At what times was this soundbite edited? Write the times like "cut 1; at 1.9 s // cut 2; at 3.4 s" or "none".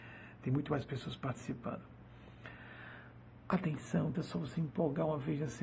cut 1; at 4.1 s // cut 2; at 4.5 s